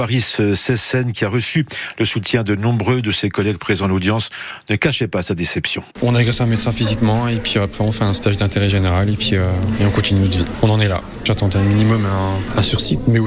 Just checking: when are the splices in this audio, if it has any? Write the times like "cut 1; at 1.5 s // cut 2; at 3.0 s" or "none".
cut 1; at 5.9 s